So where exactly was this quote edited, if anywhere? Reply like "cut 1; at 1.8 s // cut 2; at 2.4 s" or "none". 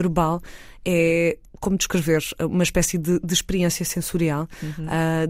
none